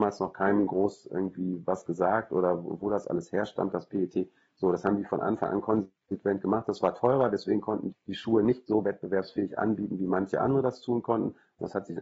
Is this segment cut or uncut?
cut